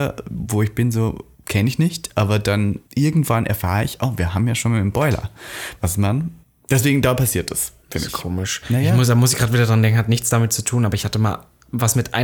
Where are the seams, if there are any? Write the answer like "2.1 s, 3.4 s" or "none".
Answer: 1.3 s, 2.8 s, 6.4 s, 7.8 s